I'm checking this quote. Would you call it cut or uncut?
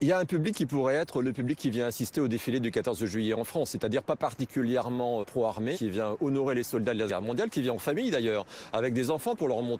cut